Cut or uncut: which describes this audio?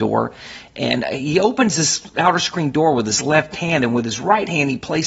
uncut